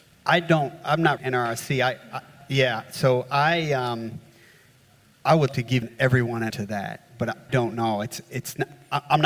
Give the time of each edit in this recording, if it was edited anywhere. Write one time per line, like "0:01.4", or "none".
0:01.2
0:05.5
0:05.8
0:06.5
0:07.5